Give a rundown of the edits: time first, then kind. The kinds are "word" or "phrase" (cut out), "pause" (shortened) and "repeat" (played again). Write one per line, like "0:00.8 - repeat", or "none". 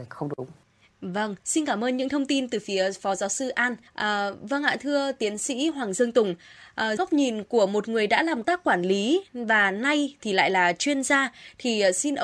0:01.4 - pause
0:03.9 - pause
0:07.0 - word
0:08.4 - word